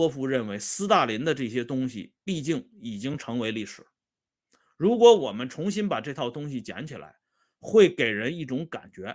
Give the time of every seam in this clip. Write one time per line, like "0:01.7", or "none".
none

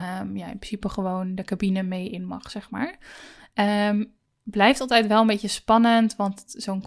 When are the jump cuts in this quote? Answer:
none

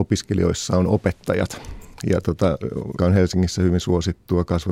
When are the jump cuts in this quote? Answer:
0:03.0

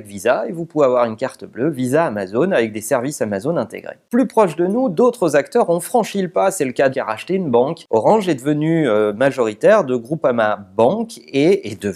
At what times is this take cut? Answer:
0:06.9

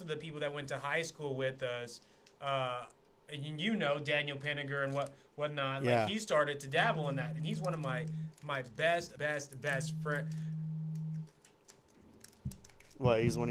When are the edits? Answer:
0:09.2

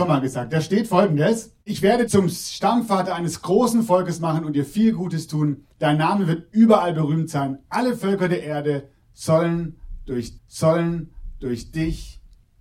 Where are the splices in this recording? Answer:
0:01.6
0:02.1
0:05.7
0:10.4

